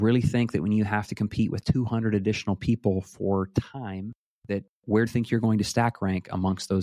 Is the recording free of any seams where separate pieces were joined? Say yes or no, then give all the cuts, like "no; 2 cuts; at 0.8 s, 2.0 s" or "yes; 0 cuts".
no; 1 cut; at 5.1 s